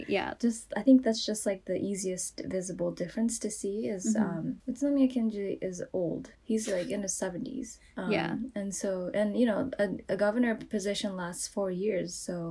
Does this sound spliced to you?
yes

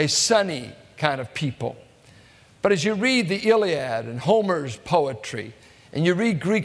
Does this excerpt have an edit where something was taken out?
no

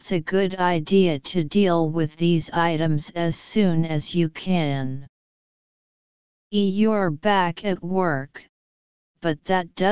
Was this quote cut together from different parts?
no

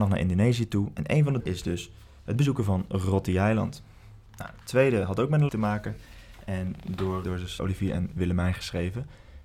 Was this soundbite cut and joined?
yes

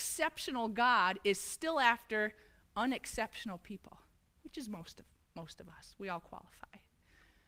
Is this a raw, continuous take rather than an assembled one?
yes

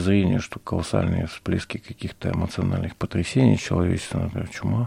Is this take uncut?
yes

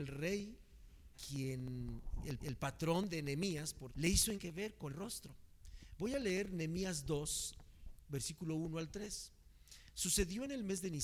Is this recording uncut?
no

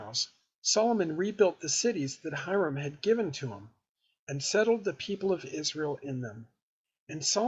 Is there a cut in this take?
no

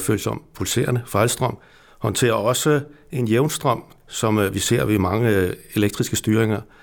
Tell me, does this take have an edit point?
no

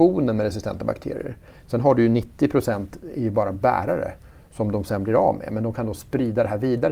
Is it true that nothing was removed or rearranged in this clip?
yes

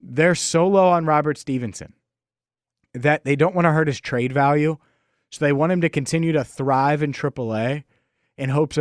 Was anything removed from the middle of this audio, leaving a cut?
no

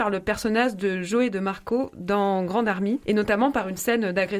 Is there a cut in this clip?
no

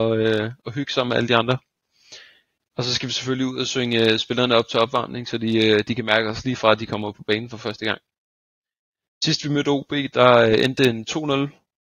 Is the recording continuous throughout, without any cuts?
yes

